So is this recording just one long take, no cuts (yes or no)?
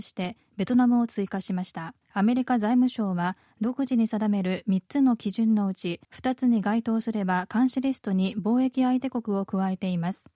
no